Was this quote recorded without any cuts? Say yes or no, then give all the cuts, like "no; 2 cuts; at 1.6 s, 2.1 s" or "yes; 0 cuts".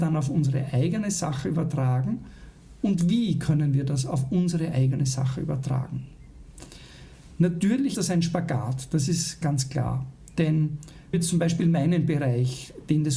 no; 3 cuts; at 7.9 s, 9.4 s, 11.1 s